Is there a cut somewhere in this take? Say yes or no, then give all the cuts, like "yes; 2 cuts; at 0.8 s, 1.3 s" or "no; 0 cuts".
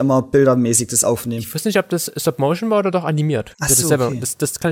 no; 0 cuts